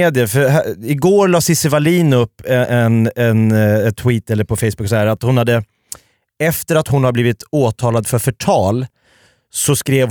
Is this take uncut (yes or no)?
yes